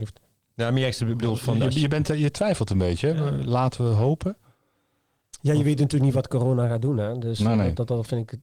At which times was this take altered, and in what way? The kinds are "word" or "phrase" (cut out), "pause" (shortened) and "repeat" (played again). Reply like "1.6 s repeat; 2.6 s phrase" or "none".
none